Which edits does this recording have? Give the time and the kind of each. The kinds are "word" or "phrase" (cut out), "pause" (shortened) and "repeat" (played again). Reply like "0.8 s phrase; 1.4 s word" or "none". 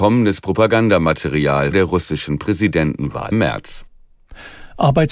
1.7 s word; 3.3 s word